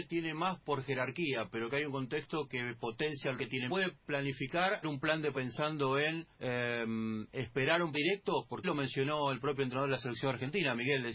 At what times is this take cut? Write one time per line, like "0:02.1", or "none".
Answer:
0:03.4
0:03.7
0:04.8
0:05.3
0:06.3
0:07.9
0:08.6